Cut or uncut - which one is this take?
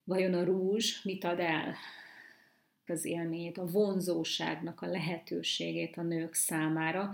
cut